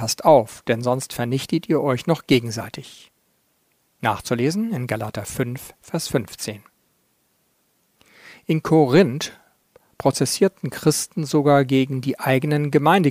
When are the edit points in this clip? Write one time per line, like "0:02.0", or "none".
none